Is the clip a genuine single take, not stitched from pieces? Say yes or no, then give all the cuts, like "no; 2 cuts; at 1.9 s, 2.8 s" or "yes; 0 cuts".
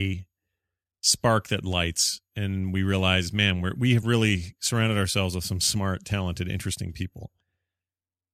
yes; 0 cuts